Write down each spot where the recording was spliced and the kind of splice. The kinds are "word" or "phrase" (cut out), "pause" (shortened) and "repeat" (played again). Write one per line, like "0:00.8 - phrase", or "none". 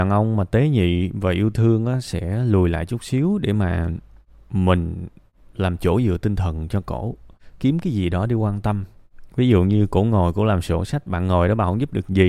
0:07.6 - word